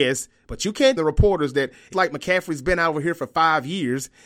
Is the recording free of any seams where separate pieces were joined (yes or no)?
no